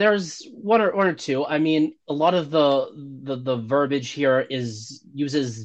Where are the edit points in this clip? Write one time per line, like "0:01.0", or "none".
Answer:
0:02.0